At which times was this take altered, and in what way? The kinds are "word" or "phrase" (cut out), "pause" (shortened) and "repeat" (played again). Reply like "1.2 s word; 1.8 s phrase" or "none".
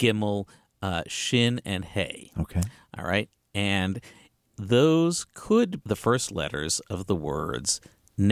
5.8 s word